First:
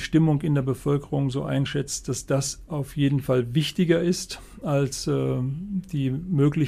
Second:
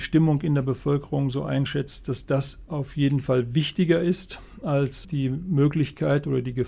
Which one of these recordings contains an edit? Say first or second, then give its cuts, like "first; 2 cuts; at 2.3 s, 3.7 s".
second; 1 cut; at 5.0 s